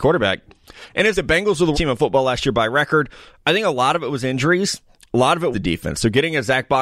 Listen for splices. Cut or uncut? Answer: cut